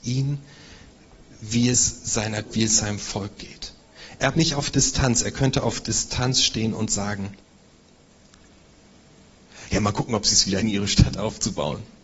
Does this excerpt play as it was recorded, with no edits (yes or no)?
no